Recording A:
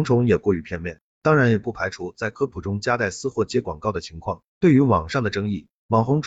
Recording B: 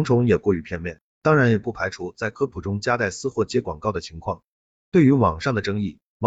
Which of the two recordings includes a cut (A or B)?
A